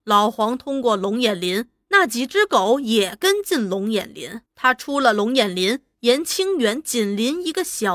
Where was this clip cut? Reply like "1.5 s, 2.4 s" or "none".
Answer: 4.5 s